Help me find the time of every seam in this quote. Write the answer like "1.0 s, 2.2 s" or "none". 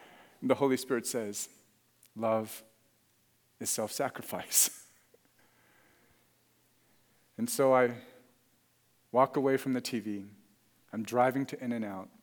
none